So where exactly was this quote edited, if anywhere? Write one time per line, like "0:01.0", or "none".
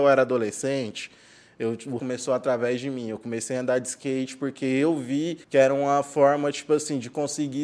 0:02.0
0:05.4